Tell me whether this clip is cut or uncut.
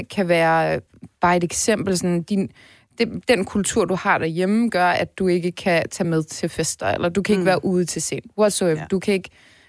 uncut